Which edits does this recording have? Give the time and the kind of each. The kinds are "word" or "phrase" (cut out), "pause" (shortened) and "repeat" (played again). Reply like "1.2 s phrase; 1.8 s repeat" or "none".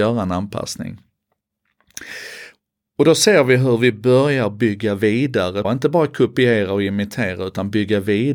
5.6 s word